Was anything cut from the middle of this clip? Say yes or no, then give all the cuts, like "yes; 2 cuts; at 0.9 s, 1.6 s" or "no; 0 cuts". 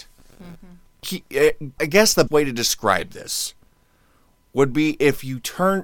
yes; 3 cuts; at 1.0 s, 1.8 s, 2.3 s